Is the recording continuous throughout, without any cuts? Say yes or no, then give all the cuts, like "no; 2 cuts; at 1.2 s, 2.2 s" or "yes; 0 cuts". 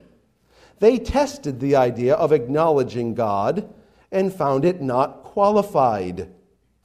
yes; 0 cuts